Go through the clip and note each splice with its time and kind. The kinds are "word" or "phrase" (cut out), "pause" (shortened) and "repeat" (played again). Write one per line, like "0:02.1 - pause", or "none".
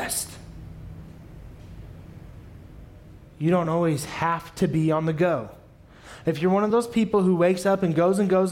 none